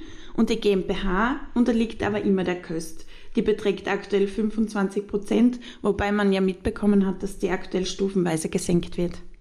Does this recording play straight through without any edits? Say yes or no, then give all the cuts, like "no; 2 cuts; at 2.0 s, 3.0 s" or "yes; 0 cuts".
yes; 0 cuts